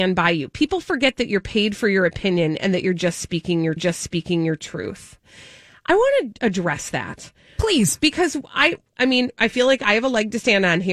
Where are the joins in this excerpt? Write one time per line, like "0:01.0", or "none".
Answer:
0:03.8